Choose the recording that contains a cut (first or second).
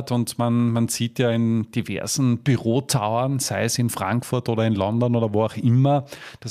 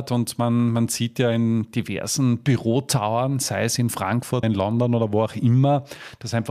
second